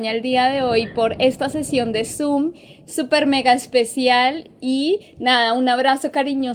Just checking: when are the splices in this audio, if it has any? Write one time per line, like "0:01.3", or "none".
none